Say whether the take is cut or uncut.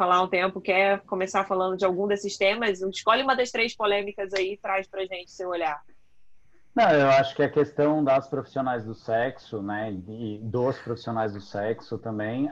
uncut